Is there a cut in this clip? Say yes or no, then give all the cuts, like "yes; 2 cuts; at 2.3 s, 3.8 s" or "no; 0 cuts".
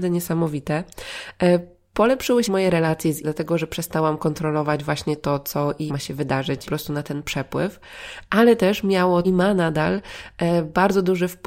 yes; 5 cuts; at 2.5 s, 3.2 s, 5.9 s, 6.7 s, 9.2 s